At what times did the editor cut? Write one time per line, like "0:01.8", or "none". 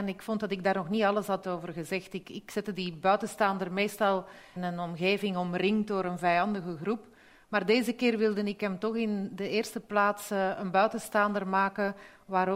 0:04.6